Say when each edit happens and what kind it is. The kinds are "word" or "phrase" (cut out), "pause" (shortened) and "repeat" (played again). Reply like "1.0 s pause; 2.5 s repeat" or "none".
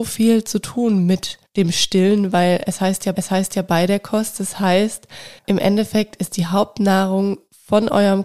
1.5 s pause; 3.1 s repeat; 5.4 s pause